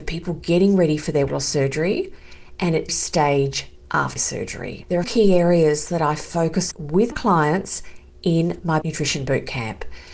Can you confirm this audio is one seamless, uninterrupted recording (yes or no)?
no